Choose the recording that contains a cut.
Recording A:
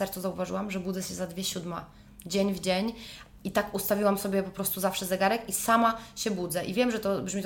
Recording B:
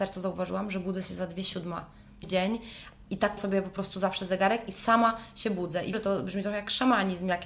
B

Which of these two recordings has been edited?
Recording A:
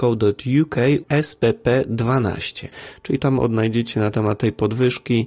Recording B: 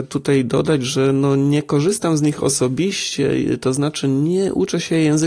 A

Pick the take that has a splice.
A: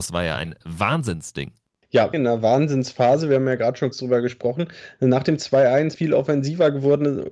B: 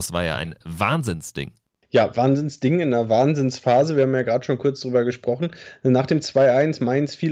A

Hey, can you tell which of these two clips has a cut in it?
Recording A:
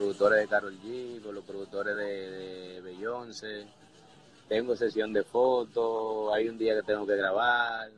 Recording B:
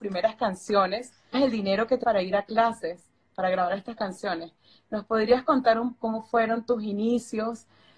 B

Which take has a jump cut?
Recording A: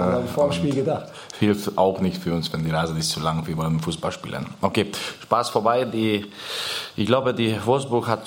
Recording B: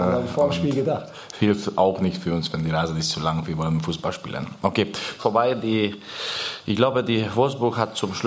B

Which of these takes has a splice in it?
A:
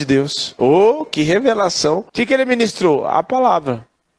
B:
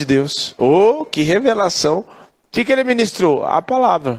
A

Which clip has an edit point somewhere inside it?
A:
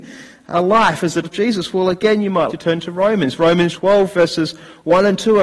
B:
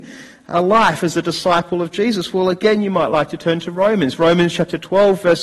A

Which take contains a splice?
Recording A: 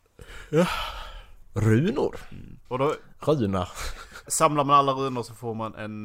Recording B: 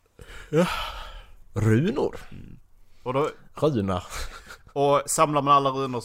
A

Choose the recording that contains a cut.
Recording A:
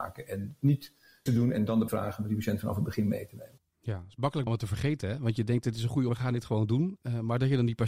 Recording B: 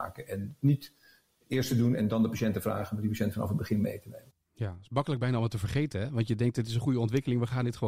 A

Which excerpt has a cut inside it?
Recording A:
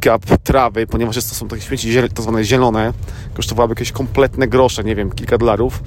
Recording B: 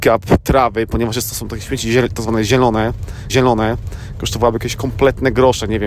B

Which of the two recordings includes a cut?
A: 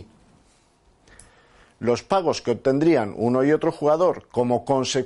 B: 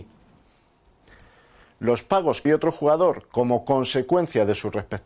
B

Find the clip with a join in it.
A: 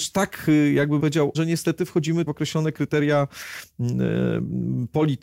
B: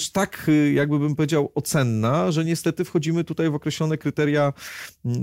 A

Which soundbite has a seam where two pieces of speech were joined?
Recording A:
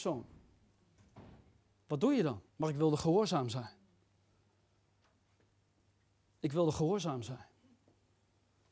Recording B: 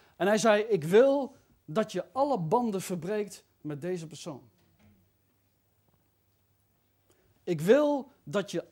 A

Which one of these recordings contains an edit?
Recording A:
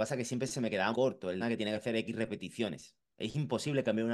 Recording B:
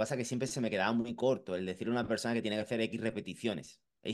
A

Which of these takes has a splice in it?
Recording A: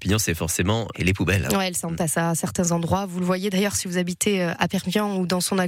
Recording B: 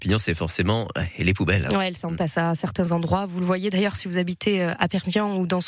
A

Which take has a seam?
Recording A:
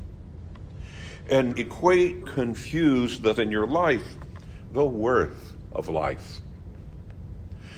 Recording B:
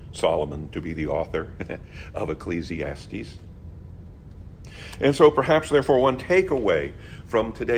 A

